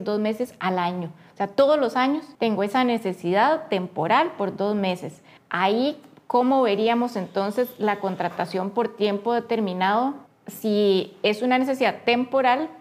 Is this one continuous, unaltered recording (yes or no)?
no